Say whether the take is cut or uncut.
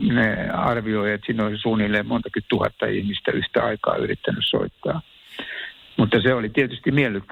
uncut